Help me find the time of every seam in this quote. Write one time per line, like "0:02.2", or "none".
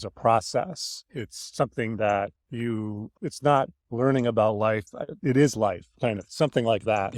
0:02.4
0:05.2